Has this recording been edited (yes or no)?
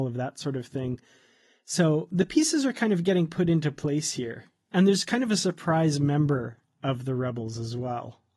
no